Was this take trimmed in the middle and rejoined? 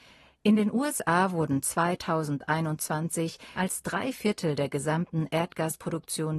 yes; 1 cut; at 3.6 s

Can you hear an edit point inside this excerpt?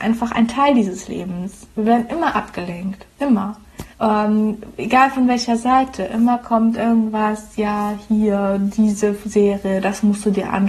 yes; 1 cut; at 3.9 s

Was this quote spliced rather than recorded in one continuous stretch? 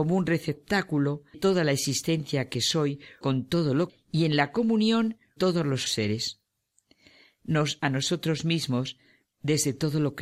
yes; 6 cuts; at 1.3 s, 3.2 s, 3.9 s, 5.4 s, 5.9 s, 7.8 s

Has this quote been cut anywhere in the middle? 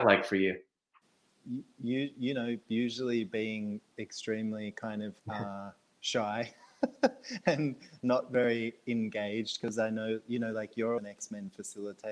yes; 3 cuts; at 3.9 s, 5.2 s, 11.0 s

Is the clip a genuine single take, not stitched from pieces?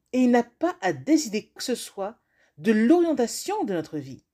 no; 1 cut; at 1.6 s

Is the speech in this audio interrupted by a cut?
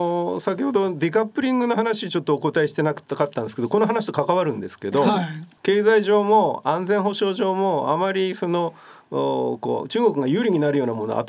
yes; 1 cut; at 5.6 s

